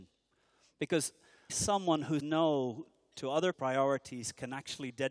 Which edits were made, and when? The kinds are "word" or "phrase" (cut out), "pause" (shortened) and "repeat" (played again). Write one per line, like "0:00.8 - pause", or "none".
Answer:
0:01.5 - word
0:02.2 - word
0:03.5 - word